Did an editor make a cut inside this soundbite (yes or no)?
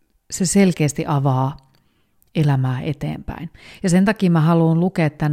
no